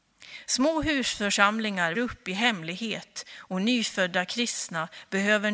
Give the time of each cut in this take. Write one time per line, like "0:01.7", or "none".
0:01.9

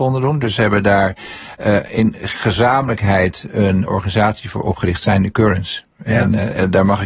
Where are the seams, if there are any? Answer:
none

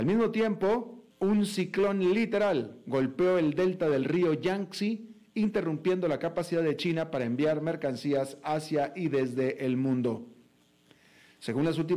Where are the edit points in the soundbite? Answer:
0:01.1

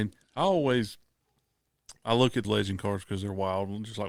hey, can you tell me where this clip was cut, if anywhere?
0:02.0
0:02.4

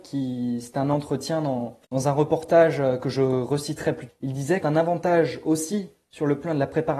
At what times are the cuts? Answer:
0:01.8
0:04.1
0:04.6

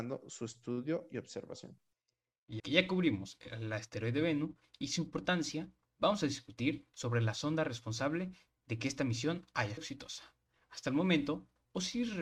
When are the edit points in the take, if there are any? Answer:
0:02.6
0:09.8

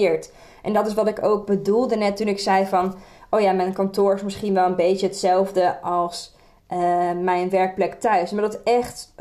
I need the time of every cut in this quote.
none

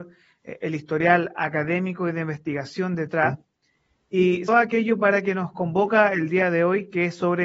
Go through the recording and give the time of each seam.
0:04.5

